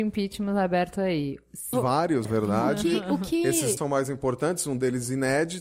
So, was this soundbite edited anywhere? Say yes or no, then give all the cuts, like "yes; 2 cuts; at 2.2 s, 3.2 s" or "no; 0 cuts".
yes; 3 cuts; at 1.7 s, 2.2 s, 3.8 s